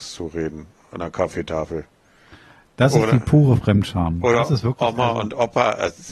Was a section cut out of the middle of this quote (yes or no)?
no